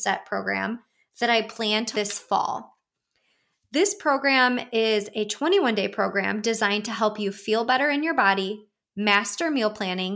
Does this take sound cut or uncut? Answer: cut